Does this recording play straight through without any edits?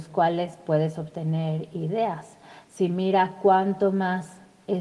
yes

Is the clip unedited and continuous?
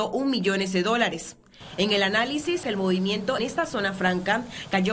no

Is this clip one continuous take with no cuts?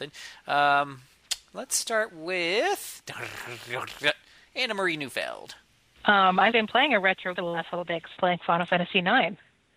no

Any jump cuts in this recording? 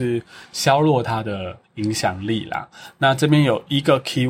yes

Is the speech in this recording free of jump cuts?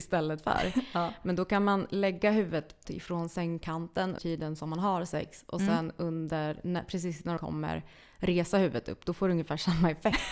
no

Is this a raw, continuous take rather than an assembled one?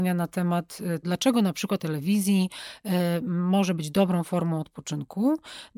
no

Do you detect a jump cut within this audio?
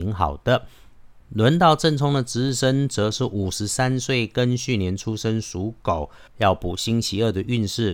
yes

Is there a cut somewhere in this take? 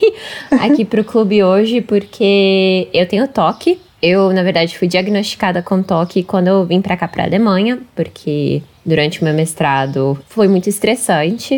no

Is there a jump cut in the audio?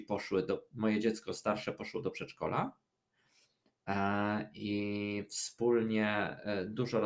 no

